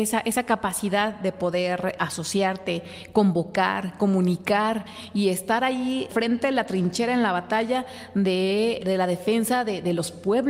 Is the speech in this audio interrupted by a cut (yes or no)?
yes